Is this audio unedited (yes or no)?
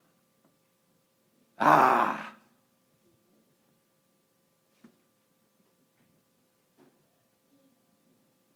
yes